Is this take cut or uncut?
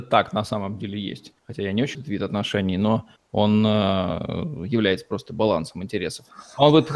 cut